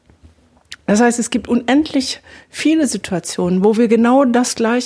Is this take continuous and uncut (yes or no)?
yes